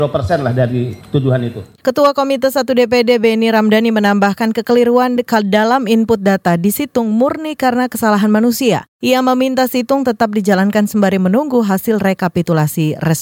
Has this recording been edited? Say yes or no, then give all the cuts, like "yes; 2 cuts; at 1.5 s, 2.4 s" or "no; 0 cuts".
no; 0 cuts